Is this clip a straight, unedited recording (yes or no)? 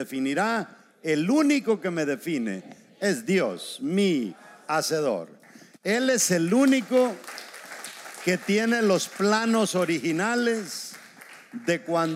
yes